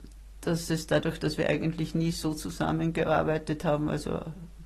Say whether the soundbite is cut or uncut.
uncut